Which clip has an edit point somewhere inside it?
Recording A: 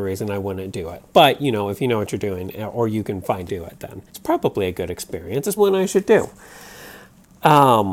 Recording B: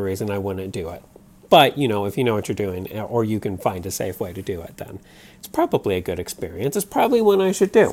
A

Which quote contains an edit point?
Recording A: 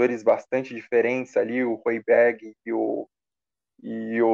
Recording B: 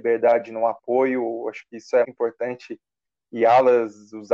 B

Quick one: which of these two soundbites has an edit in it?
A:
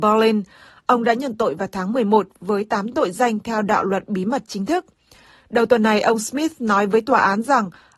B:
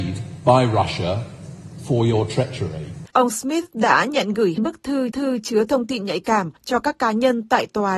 B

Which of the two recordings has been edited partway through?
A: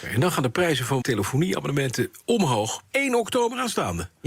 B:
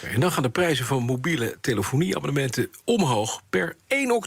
A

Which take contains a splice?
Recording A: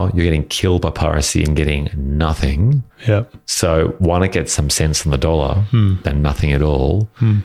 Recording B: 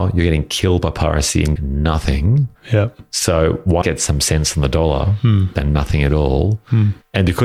B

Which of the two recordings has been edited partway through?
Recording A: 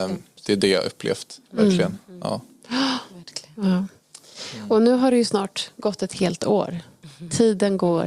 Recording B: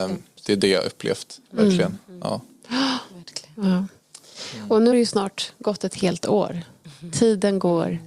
B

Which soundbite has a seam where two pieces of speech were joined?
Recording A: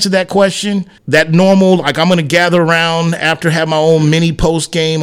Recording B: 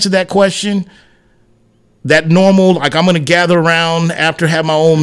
A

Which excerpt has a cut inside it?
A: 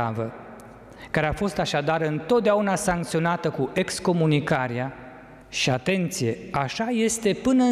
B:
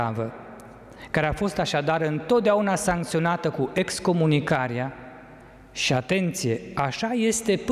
A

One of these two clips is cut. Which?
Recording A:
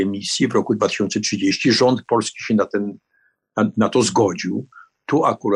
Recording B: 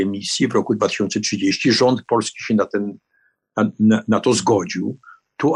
A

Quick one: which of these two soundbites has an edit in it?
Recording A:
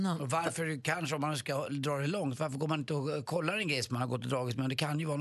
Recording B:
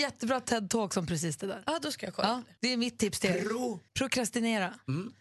B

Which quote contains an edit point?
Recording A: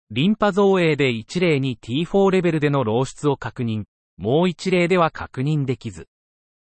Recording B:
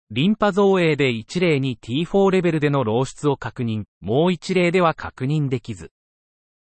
B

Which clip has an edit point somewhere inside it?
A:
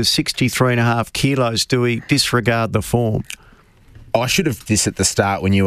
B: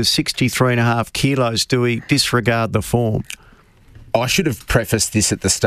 A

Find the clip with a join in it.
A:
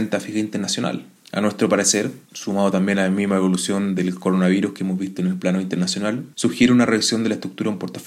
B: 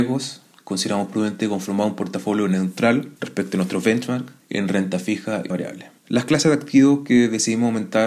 B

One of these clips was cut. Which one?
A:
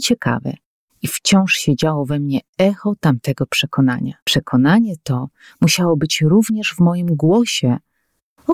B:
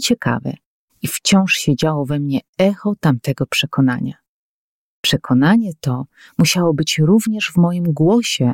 A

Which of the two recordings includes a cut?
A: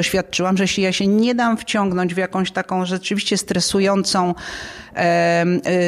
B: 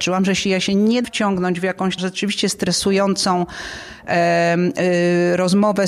B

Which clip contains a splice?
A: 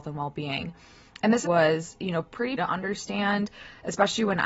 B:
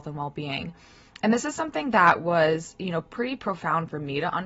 A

